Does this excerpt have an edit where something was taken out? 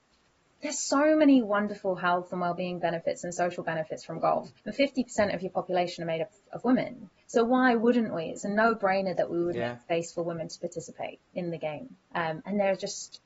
yes; 2 cuts; at 4.6 s, 12.0 s

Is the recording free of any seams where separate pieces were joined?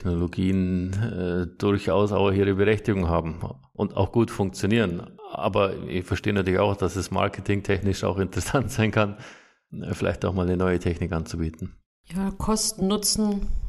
yes; 0 cuts

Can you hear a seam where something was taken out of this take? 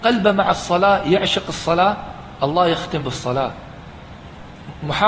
yes; 1 cut; at 3.0 s

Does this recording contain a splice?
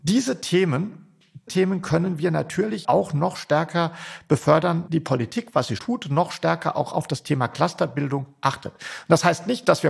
yes; 4 cuts; at 1.5 s, 2.8 s, 4.9 s, 5.8 s

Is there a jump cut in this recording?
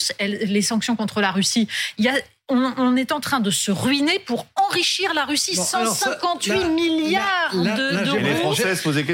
no; 0 cuts

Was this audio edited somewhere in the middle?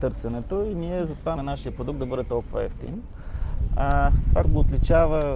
yes; 2 cuts; at 1.4 s, 4.4 s

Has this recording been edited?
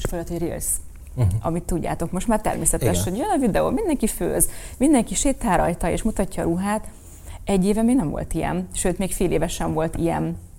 no; 0 cuts

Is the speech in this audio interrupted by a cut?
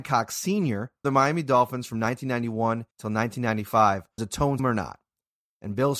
yes; 4 cuts; at 1.0 s, 2.9 s, 4.2 s, 4.6 s

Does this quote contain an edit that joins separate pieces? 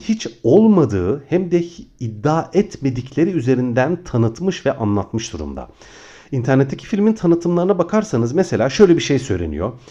no; 0 cuts

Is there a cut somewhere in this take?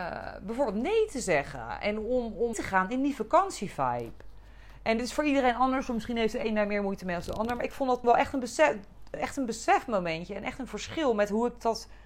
yes; 2 cuts; at 2.5 s, 8.0 s

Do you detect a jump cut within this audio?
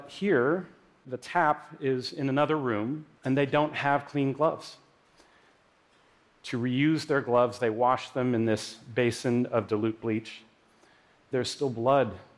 yes; 1 cut; at 3.2 s

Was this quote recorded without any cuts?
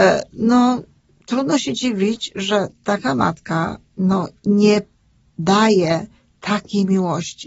yes; 0 cuts

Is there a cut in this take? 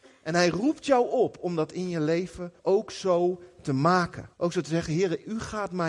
yes; 2 cuts; at 2.6 s, 4.3 s

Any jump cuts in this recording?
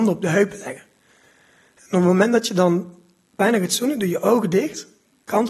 no; 0 cuts

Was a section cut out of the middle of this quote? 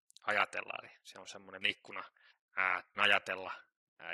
yes; 2 cuts; at 1.6 s, 3.0 s

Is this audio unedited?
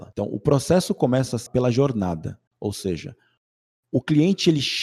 no; 2 cuts; at 1.5 s, 2.5 s

